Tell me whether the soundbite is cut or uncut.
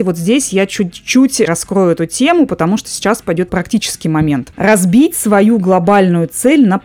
cut